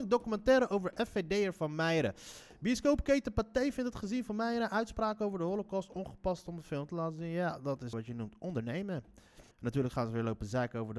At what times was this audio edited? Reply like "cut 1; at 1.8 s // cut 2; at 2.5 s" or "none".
cut 1; at 7.9 s // cut 2; at 9.5 s